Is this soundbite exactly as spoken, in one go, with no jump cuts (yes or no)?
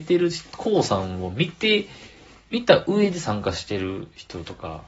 yes